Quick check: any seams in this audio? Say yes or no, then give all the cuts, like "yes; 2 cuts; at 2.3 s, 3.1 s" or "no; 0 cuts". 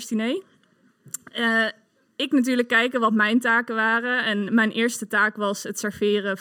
no; 0 cuts